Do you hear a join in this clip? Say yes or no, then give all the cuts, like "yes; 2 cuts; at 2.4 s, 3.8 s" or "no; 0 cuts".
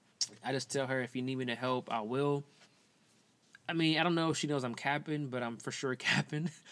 no; 0 cuts